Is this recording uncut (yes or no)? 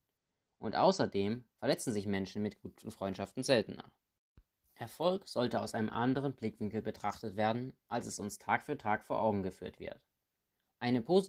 yes